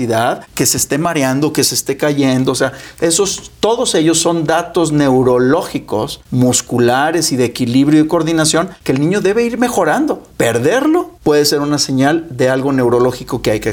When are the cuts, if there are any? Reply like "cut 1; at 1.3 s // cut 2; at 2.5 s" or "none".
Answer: none